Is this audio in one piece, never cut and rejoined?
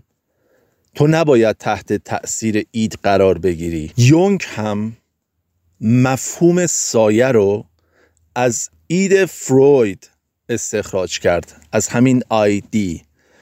yes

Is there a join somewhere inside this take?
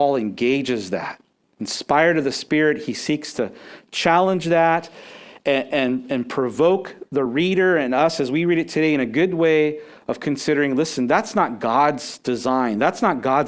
no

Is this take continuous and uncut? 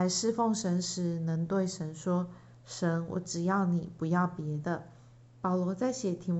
no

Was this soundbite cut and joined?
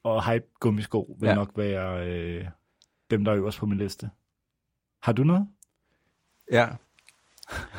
no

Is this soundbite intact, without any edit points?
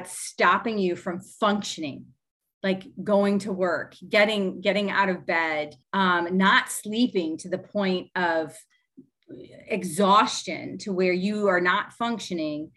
no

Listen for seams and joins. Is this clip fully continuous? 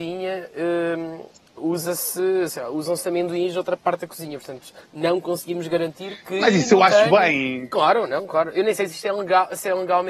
no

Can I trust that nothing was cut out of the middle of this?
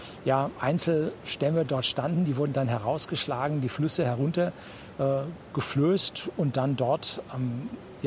yes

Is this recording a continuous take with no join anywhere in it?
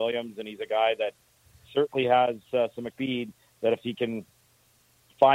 no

